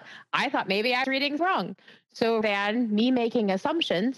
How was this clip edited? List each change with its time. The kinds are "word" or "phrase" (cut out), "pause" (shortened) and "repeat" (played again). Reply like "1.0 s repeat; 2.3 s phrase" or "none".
1.0 s word; 1.4 s word; 2.4 s word